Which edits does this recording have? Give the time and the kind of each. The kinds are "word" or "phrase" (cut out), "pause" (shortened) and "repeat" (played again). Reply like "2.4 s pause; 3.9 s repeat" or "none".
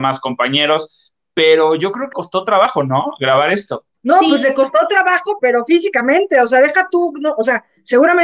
2.1 s phrase; 3.9 s pause; 5.4 s word